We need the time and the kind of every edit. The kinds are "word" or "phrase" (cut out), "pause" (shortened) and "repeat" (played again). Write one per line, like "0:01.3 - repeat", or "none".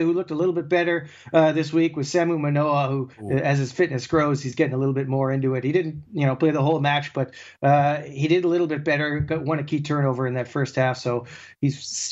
0:03.1 - pause